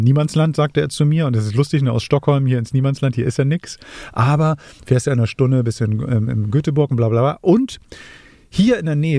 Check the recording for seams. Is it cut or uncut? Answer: uncut